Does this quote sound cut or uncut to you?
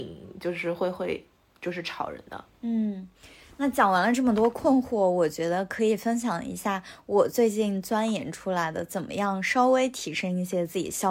uncut